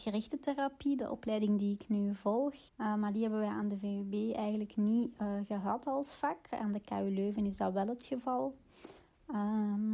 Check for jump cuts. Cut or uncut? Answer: cut